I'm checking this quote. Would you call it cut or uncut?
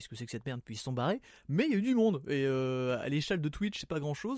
uncut